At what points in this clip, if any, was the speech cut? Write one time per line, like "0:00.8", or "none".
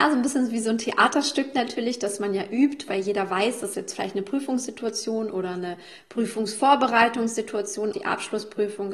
0:03.7
0:07.9